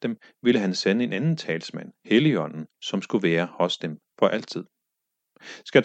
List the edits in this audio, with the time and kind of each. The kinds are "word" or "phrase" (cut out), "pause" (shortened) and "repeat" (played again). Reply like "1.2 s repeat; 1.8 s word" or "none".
2.7 s pause